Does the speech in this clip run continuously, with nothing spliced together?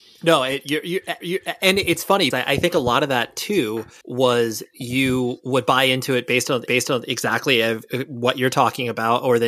no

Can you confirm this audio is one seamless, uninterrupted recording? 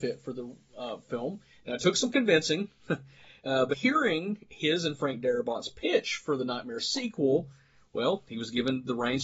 no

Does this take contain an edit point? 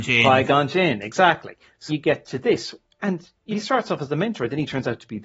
yes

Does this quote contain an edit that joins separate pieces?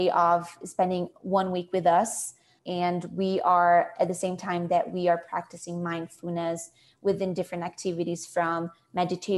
no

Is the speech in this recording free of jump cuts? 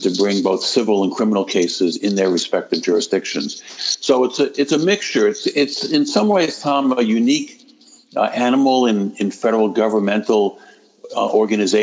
yes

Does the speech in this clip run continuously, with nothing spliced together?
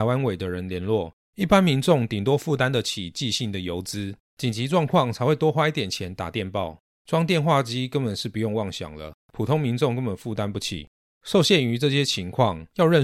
yes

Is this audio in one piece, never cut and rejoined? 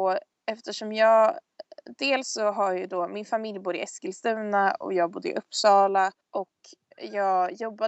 no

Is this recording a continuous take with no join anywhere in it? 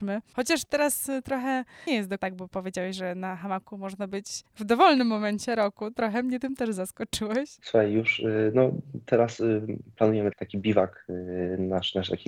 no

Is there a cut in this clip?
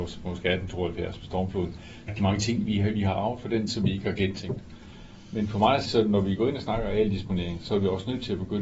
yes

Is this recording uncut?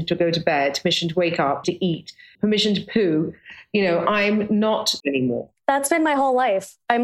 no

